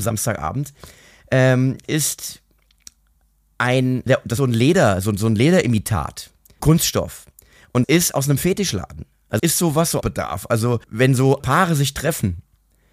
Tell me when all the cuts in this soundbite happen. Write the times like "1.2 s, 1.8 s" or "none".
1.8 s, 4.1 s, 4.4 s, 6.6 s, 7.8 s, 9.4 s, 10.0 s, 10.8 s, 11.4 s